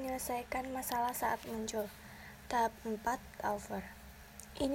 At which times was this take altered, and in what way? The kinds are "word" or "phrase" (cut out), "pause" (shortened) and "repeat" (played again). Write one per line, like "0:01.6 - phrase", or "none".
0:03.4 - word